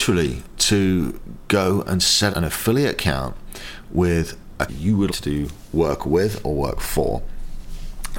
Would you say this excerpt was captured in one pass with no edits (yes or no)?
no